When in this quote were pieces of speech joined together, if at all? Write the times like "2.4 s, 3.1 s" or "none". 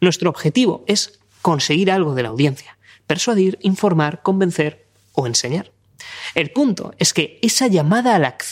none